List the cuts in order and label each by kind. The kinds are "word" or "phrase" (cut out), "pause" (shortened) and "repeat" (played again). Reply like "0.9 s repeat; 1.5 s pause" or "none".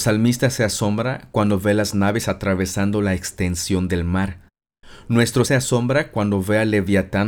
5.4 s word